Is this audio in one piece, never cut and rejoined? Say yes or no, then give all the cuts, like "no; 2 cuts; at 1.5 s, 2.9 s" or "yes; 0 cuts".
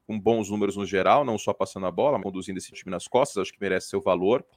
no; 2 cuts; at 2.2 s, 2.7 s